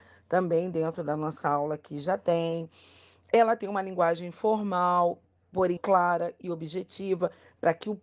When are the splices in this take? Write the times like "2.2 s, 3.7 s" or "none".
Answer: 5.8 s